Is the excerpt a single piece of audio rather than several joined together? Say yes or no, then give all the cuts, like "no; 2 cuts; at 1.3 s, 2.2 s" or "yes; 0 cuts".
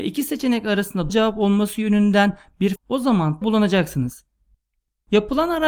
no; 3 cuts; at 1.1 s, 2.8 s, 3.4 s